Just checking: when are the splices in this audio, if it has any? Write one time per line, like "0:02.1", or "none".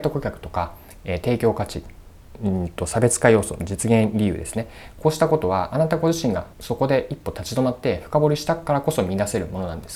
0:06.5